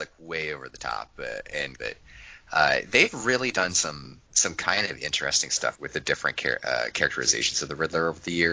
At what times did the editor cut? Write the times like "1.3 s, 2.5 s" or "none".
1.8 s, 4.3 s, 5.7 s